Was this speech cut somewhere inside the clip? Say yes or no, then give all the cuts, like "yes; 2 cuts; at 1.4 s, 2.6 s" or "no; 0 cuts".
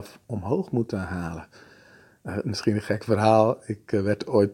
no; 0 cuts